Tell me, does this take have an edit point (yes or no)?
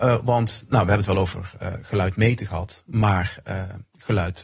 no